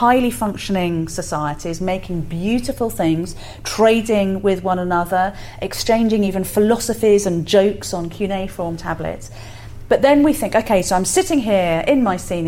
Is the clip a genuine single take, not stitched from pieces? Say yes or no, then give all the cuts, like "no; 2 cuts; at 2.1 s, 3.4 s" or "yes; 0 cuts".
yes; 0 cuts